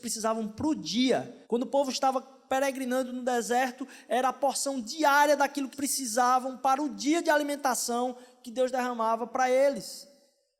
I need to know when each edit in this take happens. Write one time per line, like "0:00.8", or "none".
0:01.4
0:05.7